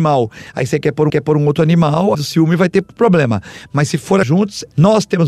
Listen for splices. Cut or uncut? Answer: cut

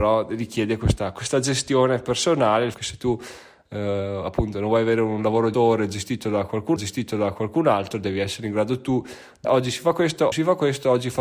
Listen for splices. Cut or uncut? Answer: cut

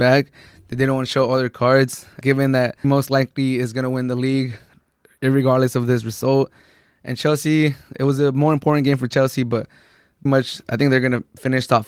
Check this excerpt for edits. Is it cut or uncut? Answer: cut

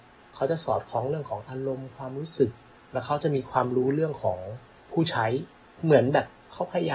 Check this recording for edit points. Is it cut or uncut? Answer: uncut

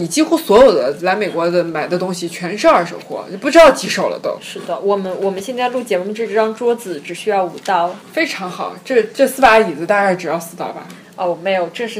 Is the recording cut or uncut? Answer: cut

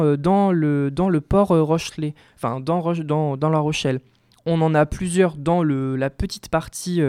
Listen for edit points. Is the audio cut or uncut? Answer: uncut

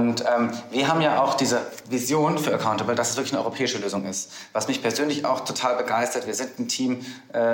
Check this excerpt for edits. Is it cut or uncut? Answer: uncut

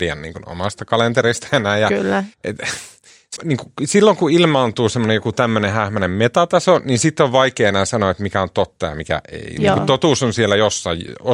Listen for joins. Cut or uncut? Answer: cut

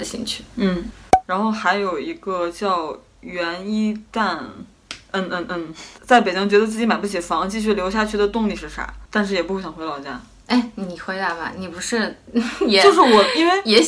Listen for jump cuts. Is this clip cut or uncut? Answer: uncut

